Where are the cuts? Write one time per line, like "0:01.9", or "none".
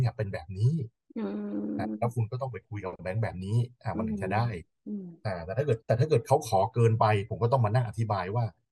0:05.8